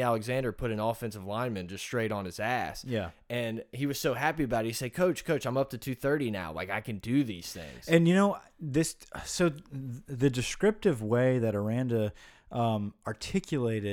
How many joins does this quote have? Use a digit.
0